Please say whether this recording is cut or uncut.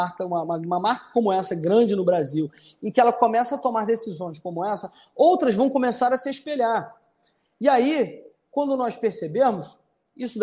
uncut